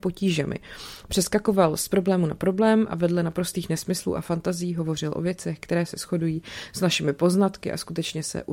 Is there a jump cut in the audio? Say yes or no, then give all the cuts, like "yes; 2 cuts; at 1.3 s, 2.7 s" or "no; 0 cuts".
no; 0 cuts